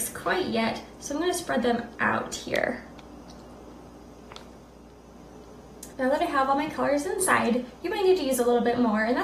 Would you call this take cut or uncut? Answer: cut